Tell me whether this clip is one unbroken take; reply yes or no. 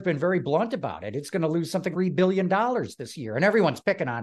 no